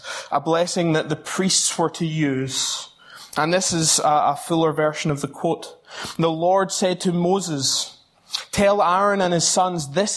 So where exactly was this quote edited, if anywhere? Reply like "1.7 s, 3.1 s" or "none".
none

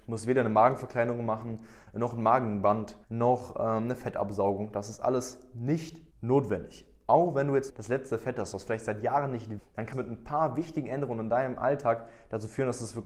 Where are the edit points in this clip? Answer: 3.0 s, 6.1 s, 7.7 s, 9.6 s, 9.9 s

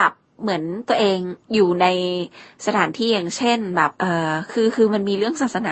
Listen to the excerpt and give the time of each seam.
1.4 s, 4.0 s

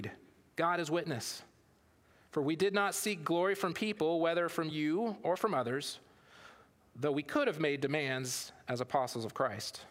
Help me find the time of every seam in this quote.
none

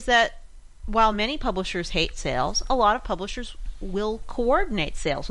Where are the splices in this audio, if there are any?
none

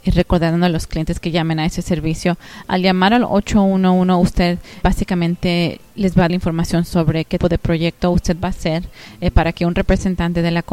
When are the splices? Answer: 4.8 s, 6.3 s, 7.4 s

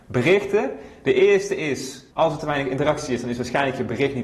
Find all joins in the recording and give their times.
2.1 s

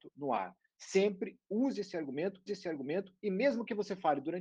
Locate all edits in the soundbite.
2.5 s

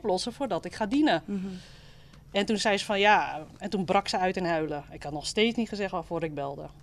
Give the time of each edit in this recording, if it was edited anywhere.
none

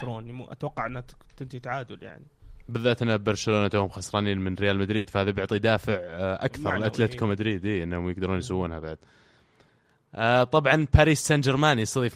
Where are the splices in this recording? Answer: none

